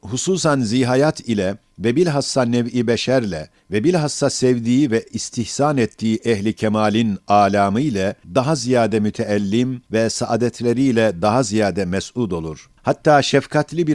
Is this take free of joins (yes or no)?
no